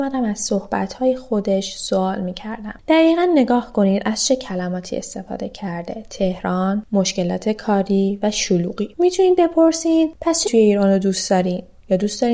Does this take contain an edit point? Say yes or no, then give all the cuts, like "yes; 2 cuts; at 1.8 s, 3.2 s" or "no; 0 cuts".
yes; 1 cut; at 10.4 s